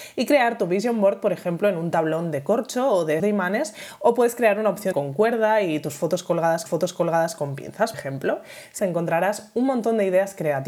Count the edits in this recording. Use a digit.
5